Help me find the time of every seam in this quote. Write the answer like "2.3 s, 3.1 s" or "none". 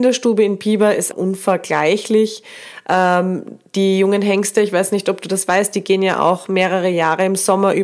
1.1 s